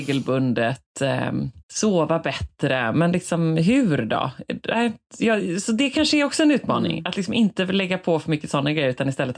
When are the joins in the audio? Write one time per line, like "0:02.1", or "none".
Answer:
0:01.6